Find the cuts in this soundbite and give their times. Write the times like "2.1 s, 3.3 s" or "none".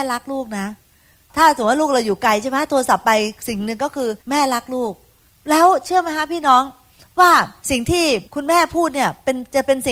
4.2 s, 5.3 s, 8.3 s